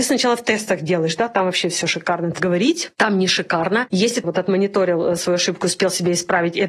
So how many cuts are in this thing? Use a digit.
3